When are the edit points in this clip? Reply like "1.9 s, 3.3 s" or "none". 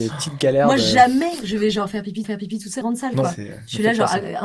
2.2 s, 2.8 s

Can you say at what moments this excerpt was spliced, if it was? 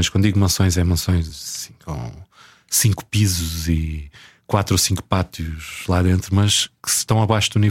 none

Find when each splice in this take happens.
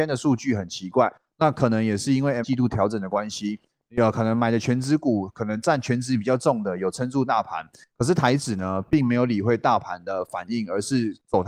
2.4 s

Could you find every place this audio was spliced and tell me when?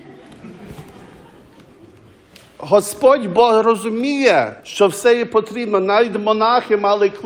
4.6 s

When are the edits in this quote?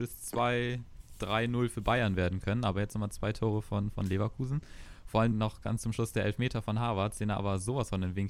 5.3 s

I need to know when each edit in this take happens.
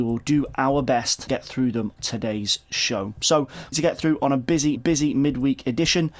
1.3 s, 2.0 s, 3.7 s, 4.8 s

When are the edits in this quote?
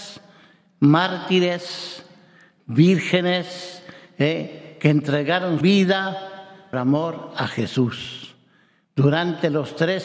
5.6 s, 6.7 s

